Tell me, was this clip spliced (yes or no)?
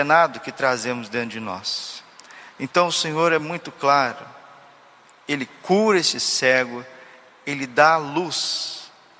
no